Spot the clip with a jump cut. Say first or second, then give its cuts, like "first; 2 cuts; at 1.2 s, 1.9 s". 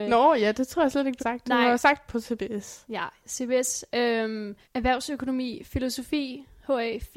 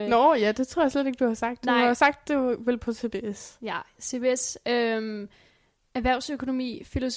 first; 3 cuts; at 1.2 s, 2.1 s, 4.6 s